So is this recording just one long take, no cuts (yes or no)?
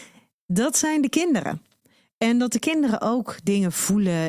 yes